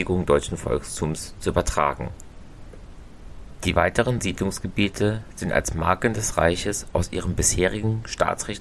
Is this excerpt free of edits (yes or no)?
yes